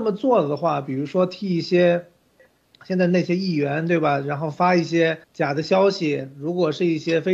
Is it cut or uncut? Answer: cut